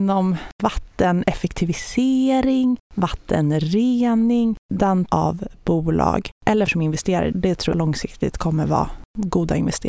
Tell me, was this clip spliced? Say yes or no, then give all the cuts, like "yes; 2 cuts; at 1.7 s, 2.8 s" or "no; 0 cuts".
yes; 4 cuts; at 5.1 s, 6.7 s, 7.3 s, 7.7 s